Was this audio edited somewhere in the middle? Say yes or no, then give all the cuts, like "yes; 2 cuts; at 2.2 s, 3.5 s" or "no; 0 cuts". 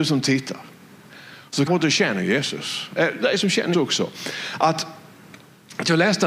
yes; 2 cuts; at 1.7 s, 3.7 s